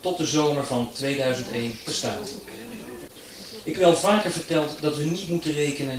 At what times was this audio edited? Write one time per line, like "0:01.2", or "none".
0:01.9
0:03.7